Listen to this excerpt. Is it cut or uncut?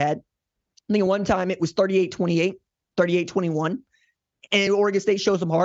uncut